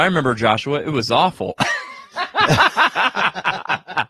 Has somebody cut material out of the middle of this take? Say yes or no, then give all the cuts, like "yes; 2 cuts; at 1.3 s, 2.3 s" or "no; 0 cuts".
no; 0 cuts